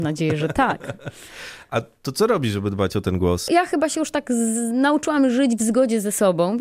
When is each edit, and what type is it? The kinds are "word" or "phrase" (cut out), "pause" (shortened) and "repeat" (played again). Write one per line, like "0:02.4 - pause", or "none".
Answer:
none